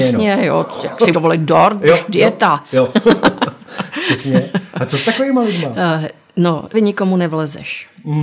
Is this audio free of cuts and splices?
no; 2 cuts; at 1.1 s, 6.7 s

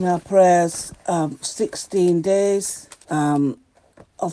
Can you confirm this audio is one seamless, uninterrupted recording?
no; 2 cuts; at 1.4 s, 3.0 s

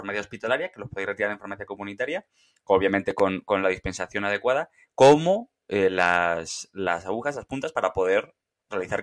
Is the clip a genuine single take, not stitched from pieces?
yes; 0 cuts

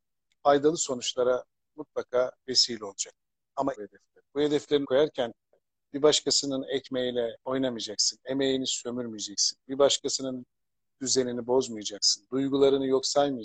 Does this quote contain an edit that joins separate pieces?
yes; 6 cuts; at 2.4 s, 3.7 s, 4.3 s, 4.8 s, 7.4 s, 11.0 s

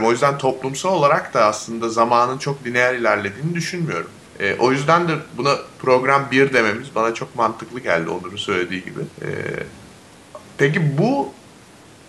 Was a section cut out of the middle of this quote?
yes; 3 cuts; at 4.3 s, 9.1 s, 10.4 s

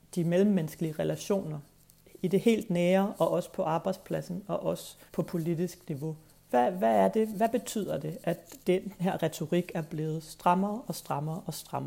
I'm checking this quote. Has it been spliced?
yes; 3 cuts; at 5.1 s, 6.3 s, 8.6 s

